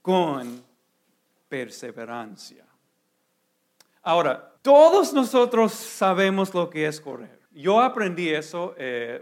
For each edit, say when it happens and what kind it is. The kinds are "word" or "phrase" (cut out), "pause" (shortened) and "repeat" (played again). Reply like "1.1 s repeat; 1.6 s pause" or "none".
4.6 s pause; 7.5 s pause

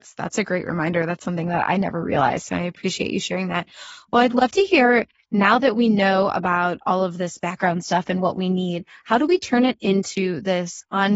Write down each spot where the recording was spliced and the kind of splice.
none

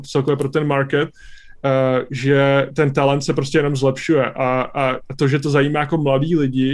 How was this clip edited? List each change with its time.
none

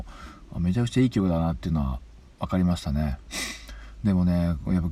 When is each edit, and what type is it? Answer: none

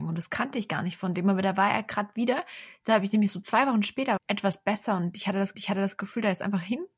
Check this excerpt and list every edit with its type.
4.2 s phrase; 5.5 s repeat

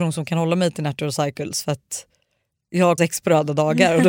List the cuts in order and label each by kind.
3.0 s phrase

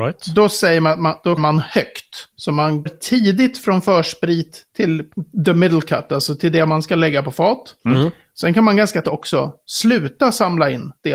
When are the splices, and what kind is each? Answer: 1.4 s word; 2.9 s word; 9.0 s word

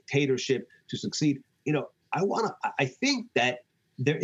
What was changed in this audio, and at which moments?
none

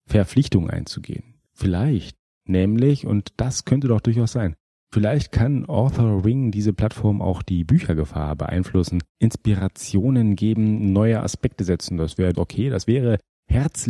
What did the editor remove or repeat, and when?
1.5 s pause; 9.1 s pause; 12.3 s word

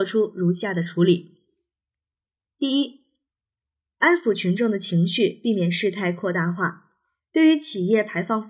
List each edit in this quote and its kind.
none

